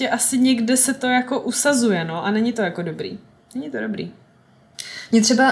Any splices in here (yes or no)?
no